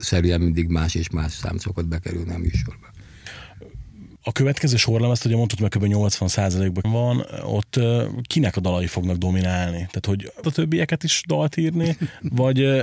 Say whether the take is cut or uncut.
cut